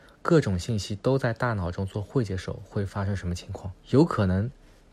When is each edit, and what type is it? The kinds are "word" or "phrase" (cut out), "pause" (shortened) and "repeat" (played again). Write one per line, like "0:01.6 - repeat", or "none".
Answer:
0:03.8 - pause